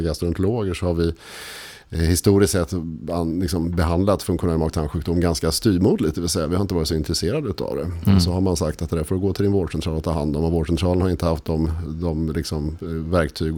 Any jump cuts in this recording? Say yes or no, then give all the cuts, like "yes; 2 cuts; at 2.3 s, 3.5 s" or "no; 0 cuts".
no; 0 cuts